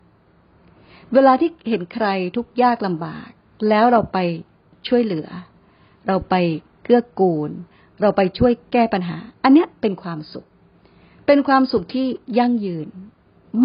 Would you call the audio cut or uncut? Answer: uncut